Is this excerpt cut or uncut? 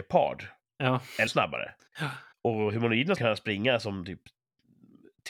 cut